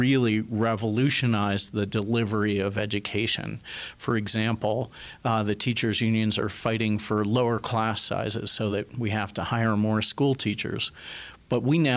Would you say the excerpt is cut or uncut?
uncut